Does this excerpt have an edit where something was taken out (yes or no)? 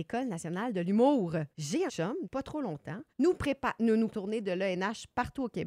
yes